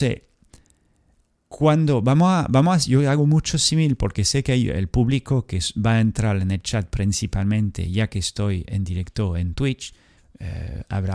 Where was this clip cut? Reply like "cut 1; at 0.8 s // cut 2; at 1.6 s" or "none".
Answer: none